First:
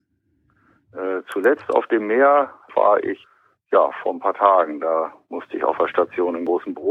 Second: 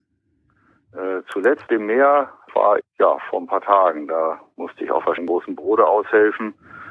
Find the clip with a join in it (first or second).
second